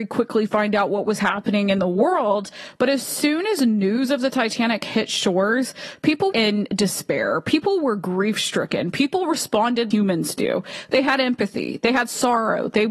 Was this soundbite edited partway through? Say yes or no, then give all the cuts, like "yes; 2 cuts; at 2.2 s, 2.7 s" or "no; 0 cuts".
yes; 2 cuts; at 6.3 s, 9.9 s